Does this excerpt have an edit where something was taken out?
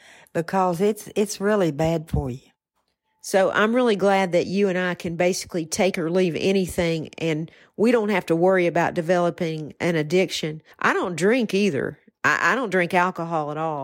yes; 1 cut; at 10.7 s

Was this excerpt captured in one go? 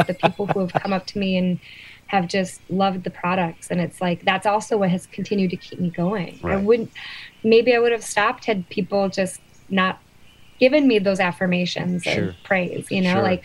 yes; 0 cuts

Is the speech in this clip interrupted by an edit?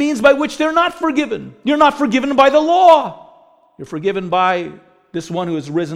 no; 0 cuts

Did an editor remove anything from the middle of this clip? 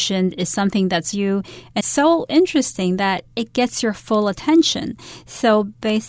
yes; 2 cuts; at 1.1 s, 1.8 s

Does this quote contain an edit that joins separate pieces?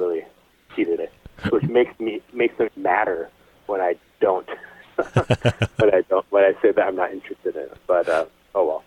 yes; 3 cuts; at 1.0 s, 1.7 s, 2.7 s

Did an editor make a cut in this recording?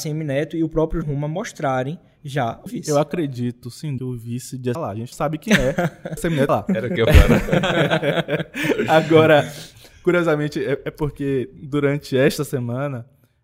yes; 8 cuts; at 1.0 s, 2.7 s, 4.0 s, 4.7 s, 5.1 s, 6.2 s, 6.5 s, 7.1 s

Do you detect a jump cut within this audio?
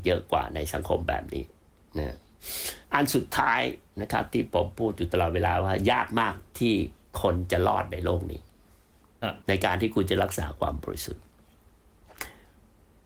yes; 3 cuts; at 1.7 s, 2.8 s, 9.4 s

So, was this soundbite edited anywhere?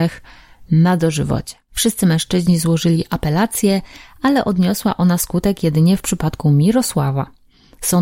no; 0 cuts

